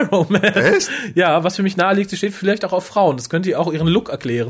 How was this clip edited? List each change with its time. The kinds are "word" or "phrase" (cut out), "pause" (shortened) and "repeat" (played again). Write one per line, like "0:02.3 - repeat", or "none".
none